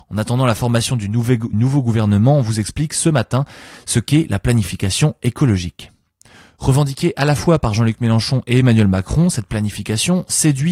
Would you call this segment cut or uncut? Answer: cut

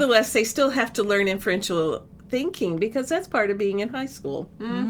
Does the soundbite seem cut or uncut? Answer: uncut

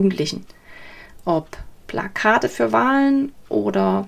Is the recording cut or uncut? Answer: uncut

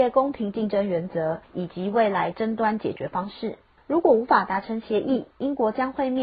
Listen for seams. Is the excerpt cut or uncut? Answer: cut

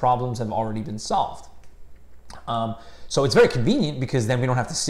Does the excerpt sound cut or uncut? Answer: uncut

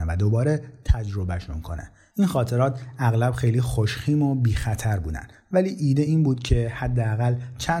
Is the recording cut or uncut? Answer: uncut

